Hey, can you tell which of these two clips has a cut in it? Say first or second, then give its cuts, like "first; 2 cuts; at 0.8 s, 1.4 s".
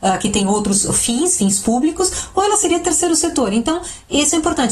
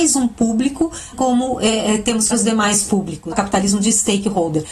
second; 3 cuts; at 1.1 s, 2.3 s, 3.3 s